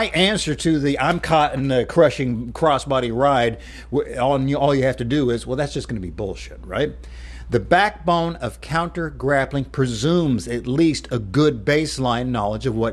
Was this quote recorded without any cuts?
yes; 0 cuts

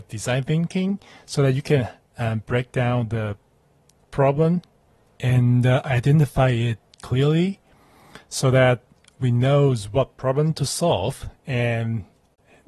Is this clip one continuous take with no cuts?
yes; 0 cuts

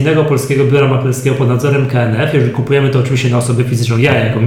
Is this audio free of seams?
yes; 0 cuts

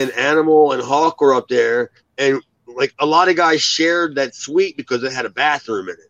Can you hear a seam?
no; 0 cuts

